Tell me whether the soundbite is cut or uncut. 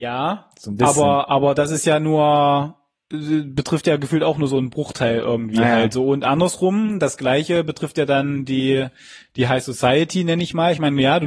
uncut